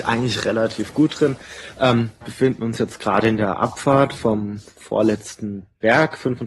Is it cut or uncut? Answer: cut